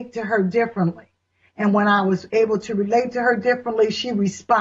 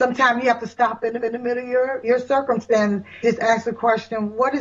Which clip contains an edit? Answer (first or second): second